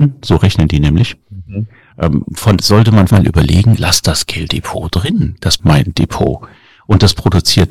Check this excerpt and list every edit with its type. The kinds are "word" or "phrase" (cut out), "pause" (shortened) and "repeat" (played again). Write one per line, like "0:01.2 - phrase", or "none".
0:02.6 - word
0:03.1 - word
0:03.8 - word
0:04.5 - word
0:05.6 - word